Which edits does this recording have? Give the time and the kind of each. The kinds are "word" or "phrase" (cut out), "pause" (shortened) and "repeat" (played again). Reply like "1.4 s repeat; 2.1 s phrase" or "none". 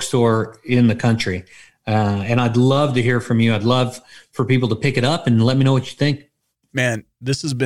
none